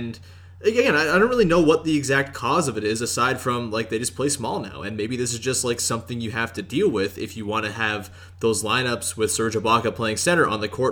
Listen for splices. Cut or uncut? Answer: uncut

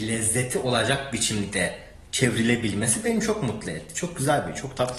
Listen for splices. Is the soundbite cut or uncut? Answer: uncut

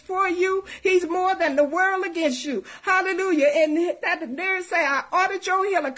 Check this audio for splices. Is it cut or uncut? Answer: uncut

